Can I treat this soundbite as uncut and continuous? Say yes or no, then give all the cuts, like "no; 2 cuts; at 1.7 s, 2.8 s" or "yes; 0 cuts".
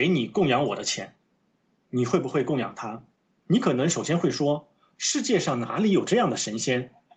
no; 1 cut; at 3.1 s